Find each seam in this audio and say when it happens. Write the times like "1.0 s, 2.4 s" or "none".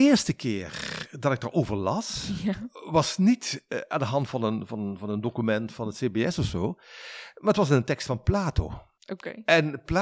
9.0 s